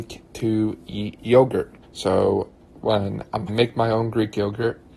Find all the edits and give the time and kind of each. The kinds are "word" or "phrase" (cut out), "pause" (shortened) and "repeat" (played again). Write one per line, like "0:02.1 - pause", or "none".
0:01.8 - pause
0:03.5 - phrase